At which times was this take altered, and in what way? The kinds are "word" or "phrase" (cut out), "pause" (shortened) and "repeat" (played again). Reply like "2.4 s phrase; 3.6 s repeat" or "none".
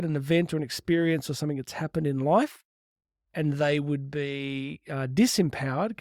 none